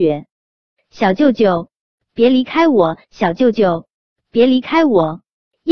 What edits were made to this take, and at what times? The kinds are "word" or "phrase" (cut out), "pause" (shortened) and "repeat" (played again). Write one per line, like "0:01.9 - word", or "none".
none